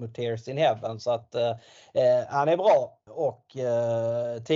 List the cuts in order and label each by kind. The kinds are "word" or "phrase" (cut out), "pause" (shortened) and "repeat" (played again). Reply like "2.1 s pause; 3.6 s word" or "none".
3.1 s word